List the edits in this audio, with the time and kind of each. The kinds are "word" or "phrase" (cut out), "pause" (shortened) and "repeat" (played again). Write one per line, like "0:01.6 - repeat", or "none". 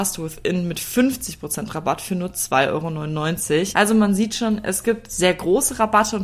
none